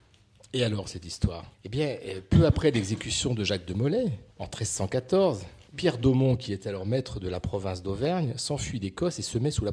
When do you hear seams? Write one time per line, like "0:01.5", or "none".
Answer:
0:01.5
0:04.3
0:05.7